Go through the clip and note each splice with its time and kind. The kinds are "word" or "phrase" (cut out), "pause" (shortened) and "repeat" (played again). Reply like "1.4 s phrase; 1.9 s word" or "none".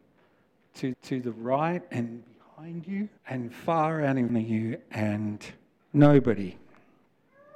0.9 s repeat; 3.2 s pause; 4.3 s word; 5.8 s pause